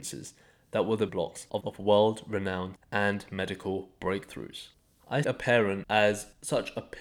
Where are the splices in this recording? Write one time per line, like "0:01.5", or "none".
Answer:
0:01.1
0:01.6
0:02.8
0:05.2